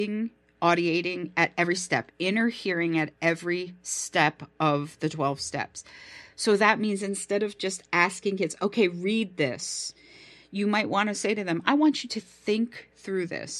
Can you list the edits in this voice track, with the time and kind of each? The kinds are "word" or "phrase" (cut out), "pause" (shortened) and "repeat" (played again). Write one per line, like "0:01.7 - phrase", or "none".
none